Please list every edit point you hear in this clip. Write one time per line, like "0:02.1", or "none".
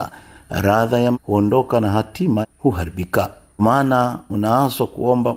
0:01.1
0:02.4
0:03.6

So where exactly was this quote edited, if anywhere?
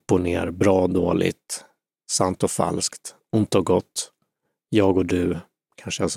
none

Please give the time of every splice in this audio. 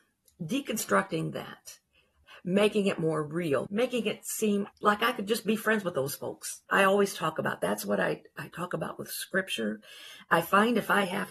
0:04.7
0:06.6

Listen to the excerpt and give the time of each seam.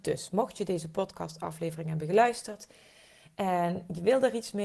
none

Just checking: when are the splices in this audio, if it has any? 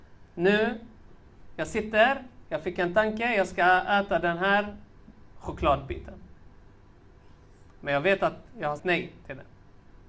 0:08.8

